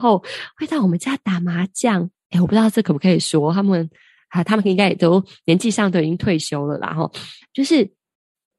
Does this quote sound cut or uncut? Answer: uncut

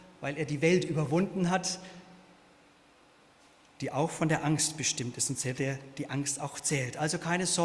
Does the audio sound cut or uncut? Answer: uncut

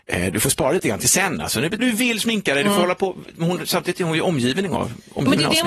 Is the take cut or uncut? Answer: cut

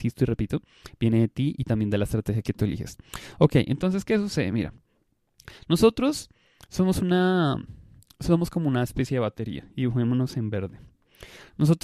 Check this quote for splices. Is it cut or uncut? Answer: uncut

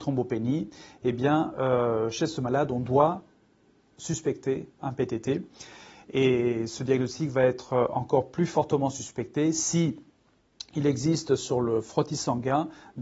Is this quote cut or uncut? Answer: cut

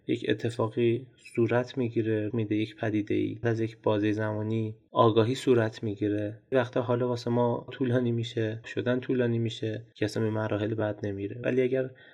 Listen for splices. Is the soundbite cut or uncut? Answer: cut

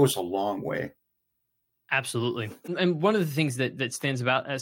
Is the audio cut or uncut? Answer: uncut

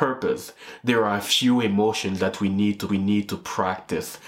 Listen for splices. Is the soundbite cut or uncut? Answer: cut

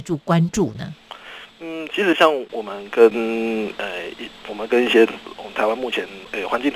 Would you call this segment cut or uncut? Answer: cut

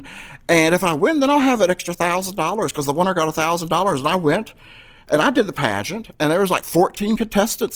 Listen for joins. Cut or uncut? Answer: uncut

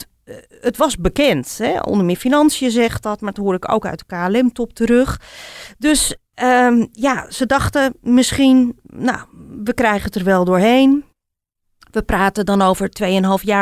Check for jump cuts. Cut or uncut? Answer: uncut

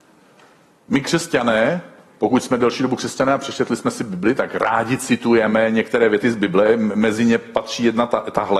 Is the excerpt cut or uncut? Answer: uncut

